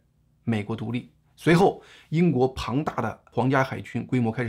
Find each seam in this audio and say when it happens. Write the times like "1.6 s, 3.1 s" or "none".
none